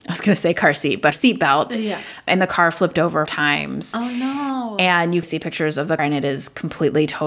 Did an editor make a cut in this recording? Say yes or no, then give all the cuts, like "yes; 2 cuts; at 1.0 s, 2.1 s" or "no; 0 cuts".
yes; 4 cuts; at 1.1 s, 3.3 s, 5.2 s, 6.0 s